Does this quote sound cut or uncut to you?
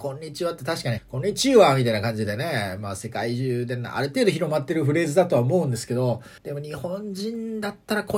cut